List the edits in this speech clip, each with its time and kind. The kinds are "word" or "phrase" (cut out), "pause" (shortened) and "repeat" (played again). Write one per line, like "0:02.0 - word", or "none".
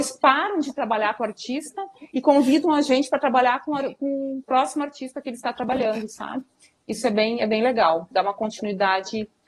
none